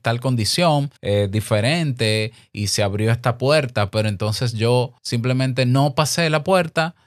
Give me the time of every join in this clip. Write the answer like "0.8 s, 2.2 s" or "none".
1.0 s, 5.0 s